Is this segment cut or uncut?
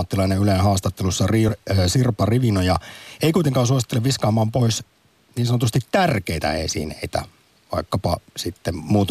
uncut